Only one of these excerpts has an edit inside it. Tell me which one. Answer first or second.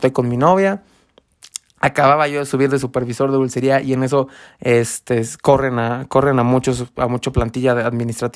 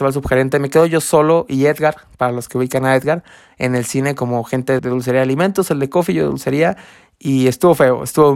second